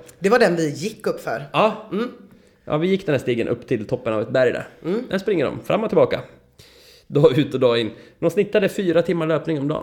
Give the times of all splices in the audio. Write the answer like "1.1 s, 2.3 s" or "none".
none